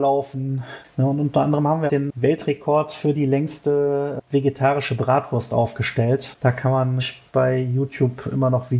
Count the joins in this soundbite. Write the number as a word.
two